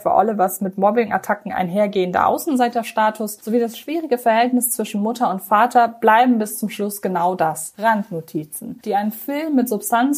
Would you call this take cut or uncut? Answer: uncut